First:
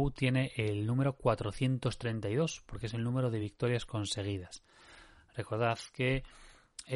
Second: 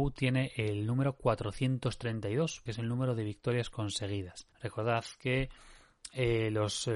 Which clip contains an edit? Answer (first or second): second